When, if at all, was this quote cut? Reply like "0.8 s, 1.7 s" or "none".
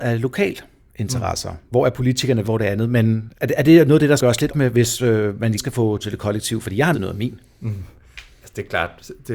2.4 s, 3.3 s, 4.2 s, 4.5 s, 5.6 s, 6.0 s, 6.9 s